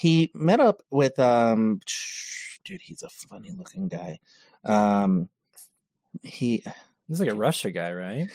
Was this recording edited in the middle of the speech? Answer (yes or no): no